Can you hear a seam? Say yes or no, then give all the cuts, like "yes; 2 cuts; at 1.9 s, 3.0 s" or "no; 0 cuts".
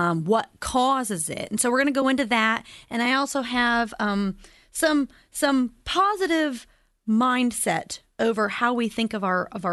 no; 0 cuts